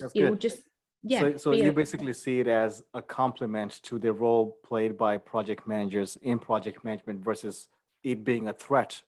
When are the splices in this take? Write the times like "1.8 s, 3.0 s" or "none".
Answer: none